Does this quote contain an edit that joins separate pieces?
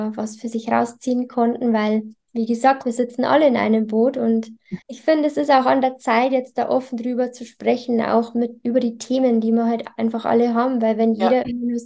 yes; 1 cut; at 4.8 s

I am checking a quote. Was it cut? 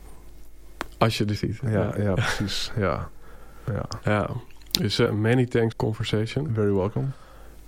yes; 3 cuts; at 1.4 s, 5.1 s, 5.7 s

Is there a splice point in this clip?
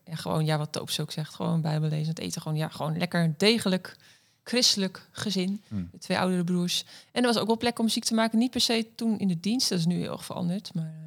no; 0 cuts

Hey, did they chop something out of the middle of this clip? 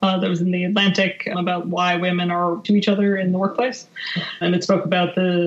yes; 3 cuts; at 1.3 s, 2.6 s, 4.4 s

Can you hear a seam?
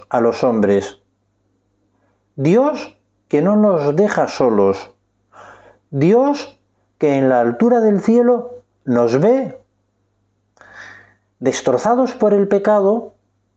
no; 0 cuts

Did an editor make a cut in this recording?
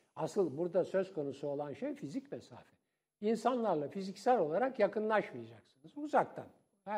no; 0 cuts

